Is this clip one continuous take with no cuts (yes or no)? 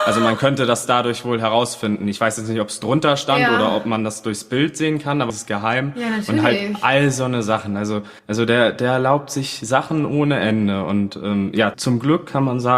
no